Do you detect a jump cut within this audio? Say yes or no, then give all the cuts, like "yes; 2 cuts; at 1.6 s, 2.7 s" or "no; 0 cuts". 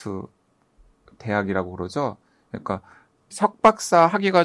yes; 1 cut; at 3.3 s